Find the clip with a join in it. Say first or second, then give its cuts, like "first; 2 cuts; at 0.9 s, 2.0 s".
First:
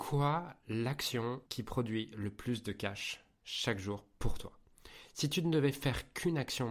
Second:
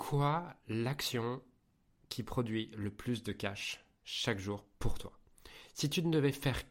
first; 1 cut; at 1.5 s